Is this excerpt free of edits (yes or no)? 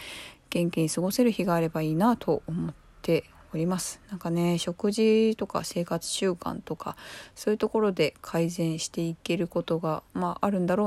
yes